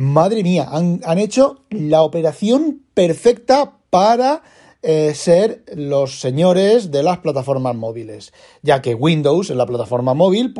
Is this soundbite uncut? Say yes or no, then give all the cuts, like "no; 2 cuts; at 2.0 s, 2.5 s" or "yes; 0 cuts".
yes; 0 cuts